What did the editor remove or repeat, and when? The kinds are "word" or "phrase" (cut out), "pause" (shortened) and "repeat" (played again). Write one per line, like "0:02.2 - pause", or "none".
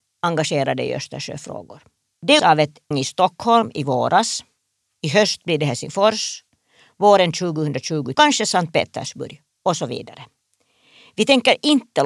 0:02.4 - word
0:02.9 - word
0:08.1 - phrase